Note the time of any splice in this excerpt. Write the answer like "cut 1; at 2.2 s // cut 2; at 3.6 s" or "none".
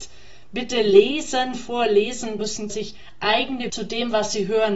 cut 1; at 2.4 s // cut 2; at 2.7 s // cut 3; at 3.7 s